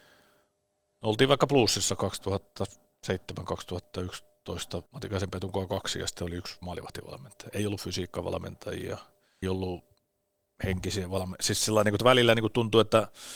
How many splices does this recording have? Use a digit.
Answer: 3